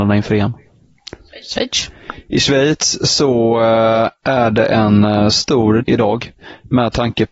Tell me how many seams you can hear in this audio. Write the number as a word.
one